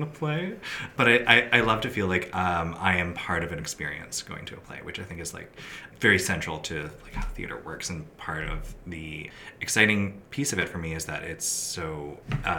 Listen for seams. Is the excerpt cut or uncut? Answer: uncut